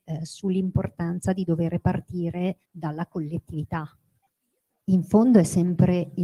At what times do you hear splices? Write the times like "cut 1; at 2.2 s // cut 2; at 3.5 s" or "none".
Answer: cut 1; at 2.6 s // cut 2; at 4.2 s